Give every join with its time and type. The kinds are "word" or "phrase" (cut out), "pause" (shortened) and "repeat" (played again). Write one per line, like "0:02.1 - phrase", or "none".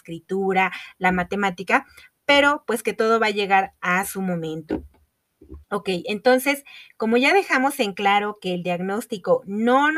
0:05.6 - pause